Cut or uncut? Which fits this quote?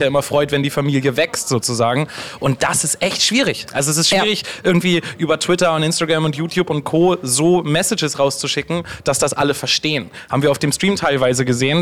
uncut